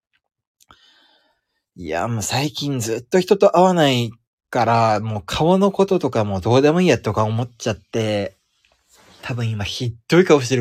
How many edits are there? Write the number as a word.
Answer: zero